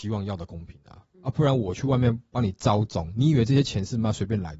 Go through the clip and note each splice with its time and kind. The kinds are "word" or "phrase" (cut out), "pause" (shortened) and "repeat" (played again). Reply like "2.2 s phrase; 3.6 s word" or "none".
1.1 s pause